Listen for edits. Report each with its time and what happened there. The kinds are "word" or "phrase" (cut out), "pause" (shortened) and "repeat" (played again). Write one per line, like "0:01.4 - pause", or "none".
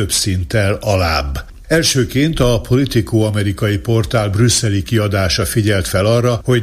none